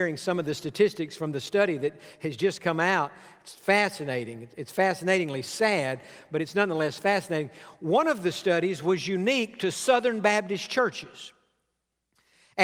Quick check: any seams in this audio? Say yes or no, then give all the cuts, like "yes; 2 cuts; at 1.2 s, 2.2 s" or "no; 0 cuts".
no; 0 cuts